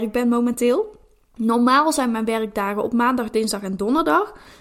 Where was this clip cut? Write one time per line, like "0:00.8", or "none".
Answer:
none